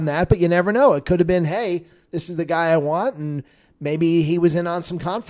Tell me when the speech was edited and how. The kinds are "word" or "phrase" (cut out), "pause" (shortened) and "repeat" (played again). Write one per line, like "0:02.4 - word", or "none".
none